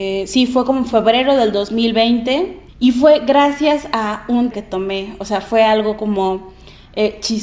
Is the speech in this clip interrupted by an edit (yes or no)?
yes